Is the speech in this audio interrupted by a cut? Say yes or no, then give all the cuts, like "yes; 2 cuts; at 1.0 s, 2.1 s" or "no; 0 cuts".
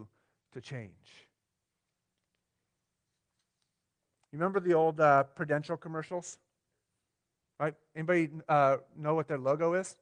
no; 0 cuts